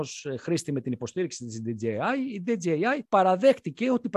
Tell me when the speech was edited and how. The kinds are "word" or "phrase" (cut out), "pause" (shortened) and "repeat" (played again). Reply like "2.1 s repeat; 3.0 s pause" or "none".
3.1 s pause